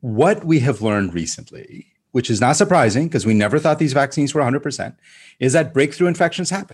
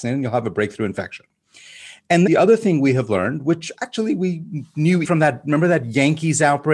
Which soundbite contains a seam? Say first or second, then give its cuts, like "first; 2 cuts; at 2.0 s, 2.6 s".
second; 2 cuts; at 2.3 s, 5.0 s